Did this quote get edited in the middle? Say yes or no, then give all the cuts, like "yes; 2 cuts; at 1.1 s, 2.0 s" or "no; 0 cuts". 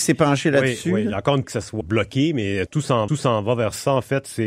yes; 4 cuts; at 1.4 s, 1.8 s, 2.7 s, 3.1 s